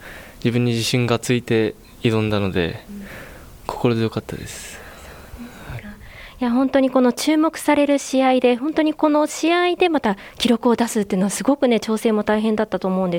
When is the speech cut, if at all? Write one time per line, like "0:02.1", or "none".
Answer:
none